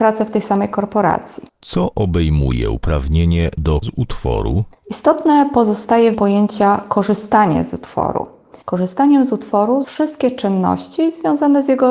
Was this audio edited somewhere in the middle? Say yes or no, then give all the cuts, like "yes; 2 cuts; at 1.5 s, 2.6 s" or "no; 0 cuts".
yes; 6 cuts; at 1.5 s, 3.8 s, 4.8 s, 6.1 s, 8.6 s, 9.8 s